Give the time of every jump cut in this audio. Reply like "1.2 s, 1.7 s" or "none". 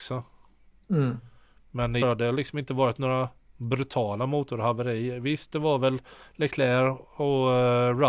2.0 s